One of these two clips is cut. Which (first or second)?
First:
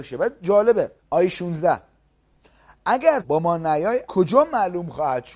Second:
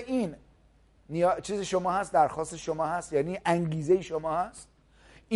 first